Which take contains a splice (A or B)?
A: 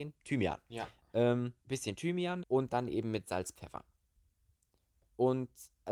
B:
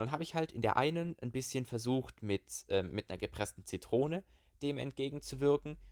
A